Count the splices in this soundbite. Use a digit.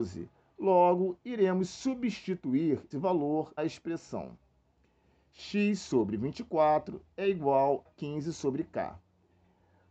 3